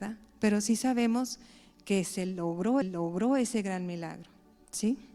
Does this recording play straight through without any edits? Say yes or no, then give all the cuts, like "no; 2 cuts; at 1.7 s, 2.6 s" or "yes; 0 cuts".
no; 1 cut; at 2.8 s